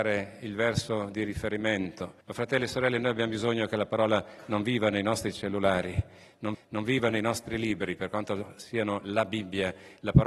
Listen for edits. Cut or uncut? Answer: cut